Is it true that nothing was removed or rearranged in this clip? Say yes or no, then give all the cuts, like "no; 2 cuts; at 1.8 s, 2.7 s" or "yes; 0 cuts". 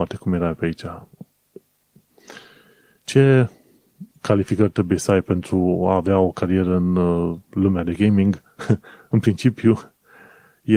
no; 2 cuts; at 4.1 s, 7.4 s